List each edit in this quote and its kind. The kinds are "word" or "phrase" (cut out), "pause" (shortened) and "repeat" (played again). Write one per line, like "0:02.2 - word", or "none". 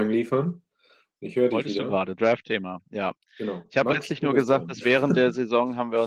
0:02.2 - word

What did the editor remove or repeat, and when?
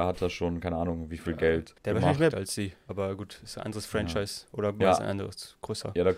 0:01.8 - pause
0:02.3 - phrase
0:04.8 - word

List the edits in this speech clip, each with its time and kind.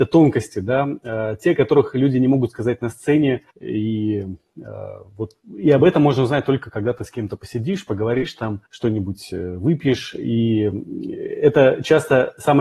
0:03.5 - pause
0:08.7 - pause

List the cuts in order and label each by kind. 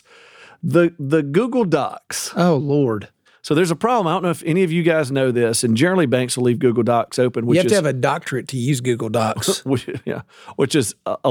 none

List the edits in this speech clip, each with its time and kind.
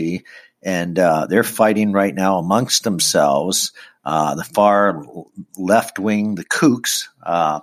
none

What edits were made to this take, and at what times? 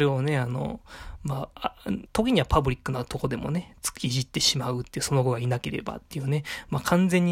0:02.1 - word

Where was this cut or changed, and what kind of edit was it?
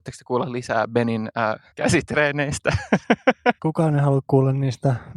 0:01.7 - pause
0:03.6 - pause

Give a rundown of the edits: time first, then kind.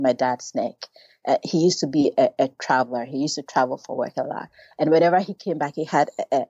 none

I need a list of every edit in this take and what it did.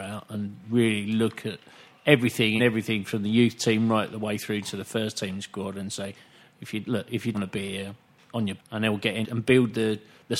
0:02.6 - word
0:07.3 - word
0:08.6 - word
0:09.2 - word

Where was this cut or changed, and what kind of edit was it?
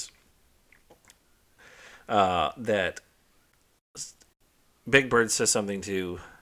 none

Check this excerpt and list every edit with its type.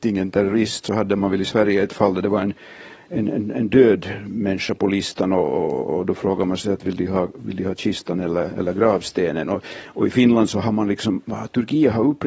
none

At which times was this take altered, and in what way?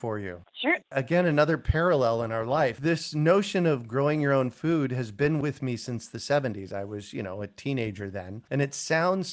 none

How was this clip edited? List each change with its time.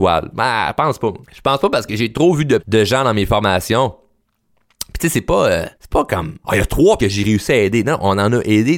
0:01.2 - pause
0:02.6 - word
0:05.7 - pause
0:06.4 - pause
0:07.0 - word

